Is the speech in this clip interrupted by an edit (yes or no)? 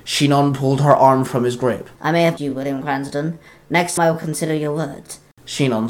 yes